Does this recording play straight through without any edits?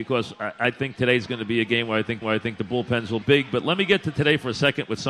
no; 2 cuts; at 2.2 s, 3.2 s

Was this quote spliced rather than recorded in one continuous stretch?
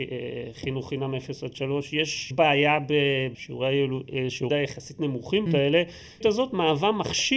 yes; 5 cuts; at 2.3 s, 3.3 s, 4.5 s, 5.5 s, 6.2 s

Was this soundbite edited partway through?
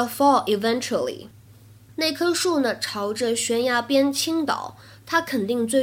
no; 0 cuts

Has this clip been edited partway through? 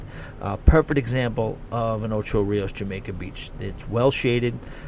no; 0 cuts

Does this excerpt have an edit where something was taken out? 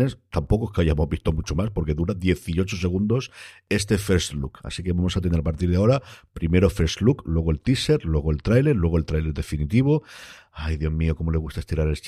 no; 0 cuts

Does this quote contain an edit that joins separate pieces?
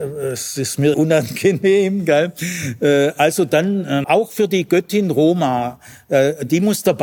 yes; 2 cuts; at 0.9 s, 4.0 s

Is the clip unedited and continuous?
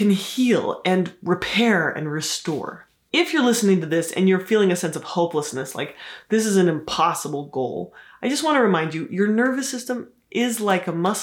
yes; 0 cuts

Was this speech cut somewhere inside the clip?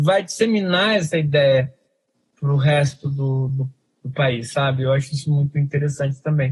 no; 0 cuts

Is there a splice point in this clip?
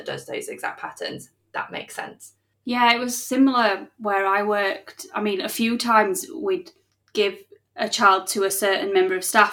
no; 0 cuts

